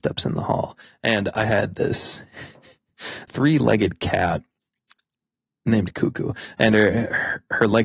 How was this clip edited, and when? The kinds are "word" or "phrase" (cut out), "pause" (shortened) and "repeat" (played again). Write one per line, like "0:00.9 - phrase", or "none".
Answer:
0:03.3 - word